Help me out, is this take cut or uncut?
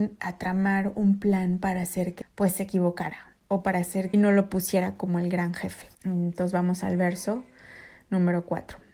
cut